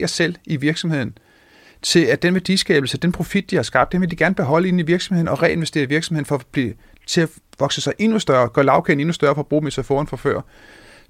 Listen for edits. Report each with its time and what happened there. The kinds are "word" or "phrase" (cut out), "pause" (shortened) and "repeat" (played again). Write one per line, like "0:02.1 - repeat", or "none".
none